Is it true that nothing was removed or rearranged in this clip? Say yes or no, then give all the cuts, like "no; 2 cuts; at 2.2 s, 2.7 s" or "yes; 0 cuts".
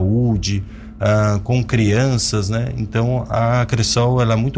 yes; 0 cuts